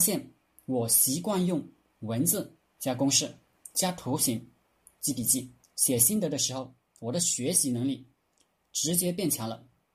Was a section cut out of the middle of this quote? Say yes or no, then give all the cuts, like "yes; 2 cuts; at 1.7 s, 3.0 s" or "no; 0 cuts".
yes; 1 cut; at 5.6 s